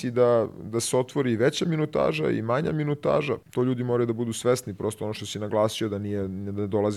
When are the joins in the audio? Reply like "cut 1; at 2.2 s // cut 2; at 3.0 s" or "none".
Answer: cut 1; at 3.4 s